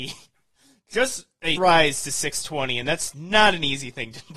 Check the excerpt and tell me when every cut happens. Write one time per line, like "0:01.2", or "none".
0:01.6